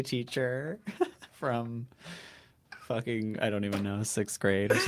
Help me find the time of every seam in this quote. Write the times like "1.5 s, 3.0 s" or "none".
1.3 s